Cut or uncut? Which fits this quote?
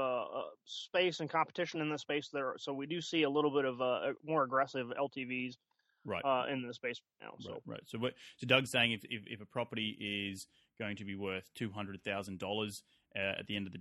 uncut